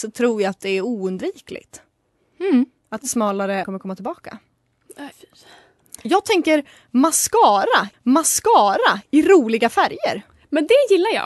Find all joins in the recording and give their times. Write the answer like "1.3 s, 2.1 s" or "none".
3.6 s, 5.1 s, 7.9 s

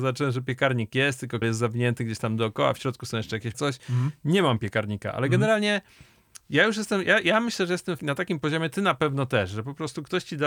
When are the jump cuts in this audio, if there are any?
1.4 s, 3.5 s, 8.0 s

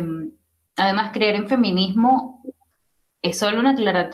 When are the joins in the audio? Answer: none

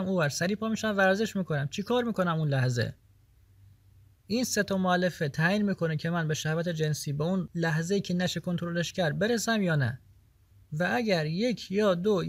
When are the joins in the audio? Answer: none

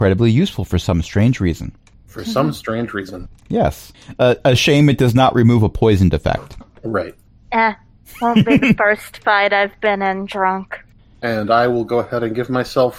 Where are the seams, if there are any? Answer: none

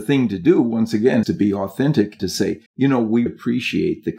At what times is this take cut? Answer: 1.2 s, 2.2 s, 2.7 s, 3.3 s

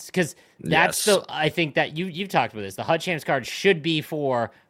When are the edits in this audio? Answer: none

